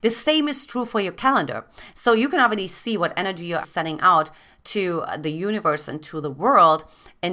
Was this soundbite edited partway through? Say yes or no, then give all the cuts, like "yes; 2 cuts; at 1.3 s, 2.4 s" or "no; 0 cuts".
yes; 1 cut; at 3.6 s